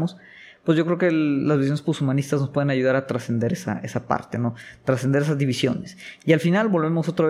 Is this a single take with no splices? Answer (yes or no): yes